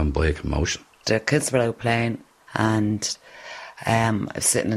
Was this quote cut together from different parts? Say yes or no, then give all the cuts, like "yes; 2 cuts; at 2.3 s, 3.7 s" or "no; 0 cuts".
yes; 2 cuts; at 0.9 s, 2.4 s